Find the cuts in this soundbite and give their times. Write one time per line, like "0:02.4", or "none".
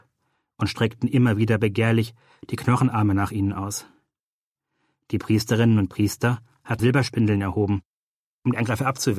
0:06.8

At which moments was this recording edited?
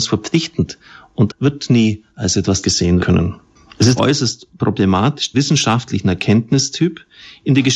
0:01.3
0:02.1
0:02.6
0:03.0
0:04.0
0:05.3

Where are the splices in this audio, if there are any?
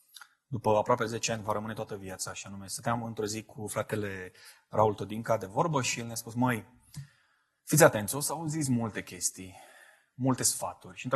none

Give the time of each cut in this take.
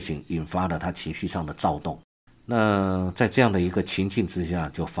0:02.3

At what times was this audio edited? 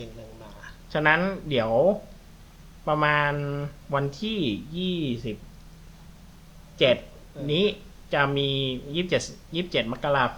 0:03.8

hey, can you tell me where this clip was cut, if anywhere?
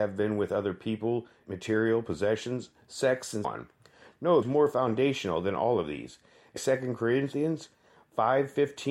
0:01.4
0:03.4
0:04.4
0:06.6

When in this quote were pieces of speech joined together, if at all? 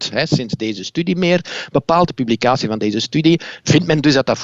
none

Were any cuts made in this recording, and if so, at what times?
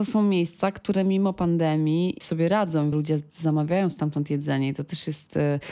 0:02.2
0:02.9

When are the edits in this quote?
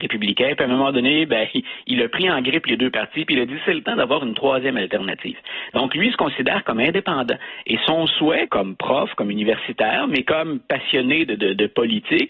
0:08.5

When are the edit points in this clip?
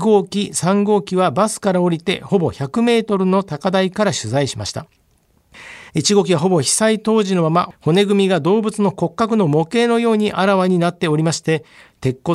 0:05.9

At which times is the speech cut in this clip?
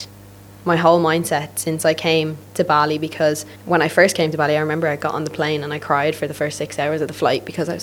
0:03.5

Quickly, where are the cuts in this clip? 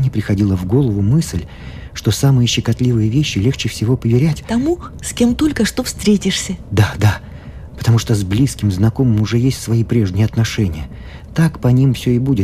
none

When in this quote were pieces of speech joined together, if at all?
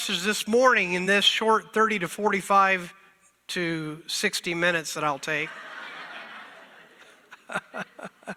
none

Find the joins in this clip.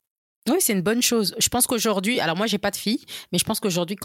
none

